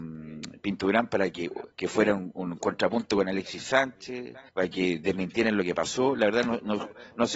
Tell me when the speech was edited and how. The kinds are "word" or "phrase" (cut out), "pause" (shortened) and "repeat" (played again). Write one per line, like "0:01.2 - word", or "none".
0:01.7 - pause
0:04.5 - pause